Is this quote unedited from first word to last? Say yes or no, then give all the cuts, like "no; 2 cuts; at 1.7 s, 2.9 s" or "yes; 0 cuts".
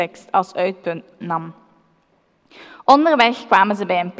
no; 1 cut; at 1.2 s